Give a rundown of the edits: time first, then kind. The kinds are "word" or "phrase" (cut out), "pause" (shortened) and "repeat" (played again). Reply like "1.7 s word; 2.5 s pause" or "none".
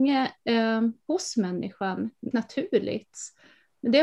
2.3 s word